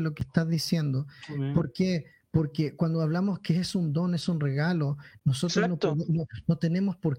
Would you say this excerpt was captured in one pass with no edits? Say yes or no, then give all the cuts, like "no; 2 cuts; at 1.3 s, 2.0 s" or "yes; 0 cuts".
yes; 0 cuts